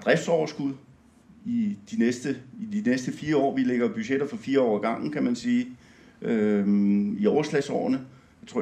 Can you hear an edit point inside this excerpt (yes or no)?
no